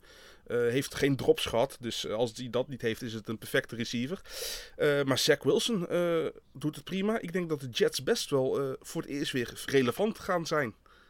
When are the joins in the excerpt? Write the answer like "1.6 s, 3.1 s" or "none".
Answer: 9.7 s